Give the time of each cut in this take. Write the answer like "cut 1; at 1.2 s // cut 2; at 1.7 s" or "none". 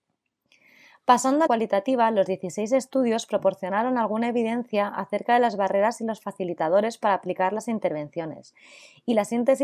cut 1; at 1.5 s